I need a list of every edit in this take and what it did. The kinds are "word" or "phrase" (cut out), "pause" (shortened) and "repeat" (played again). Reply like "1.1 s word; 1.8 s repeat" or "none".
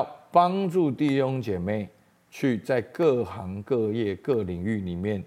none